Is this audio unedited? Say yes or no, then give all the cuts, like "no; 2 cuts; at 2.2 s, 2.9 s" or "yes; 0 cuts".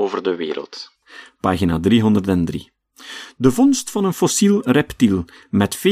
yes; 0 cuts